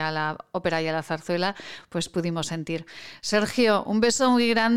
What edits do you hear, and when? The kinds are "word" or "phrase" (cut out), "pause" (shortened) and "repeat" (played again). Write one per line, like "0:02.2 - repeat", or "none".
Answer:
none